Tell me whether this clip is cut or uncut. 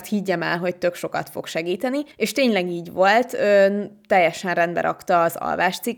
cut